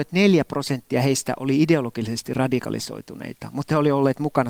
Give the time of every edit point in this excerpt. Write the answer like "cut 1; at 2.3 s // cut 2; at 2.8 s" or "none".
none